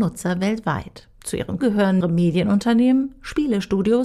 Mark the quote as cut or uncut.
cut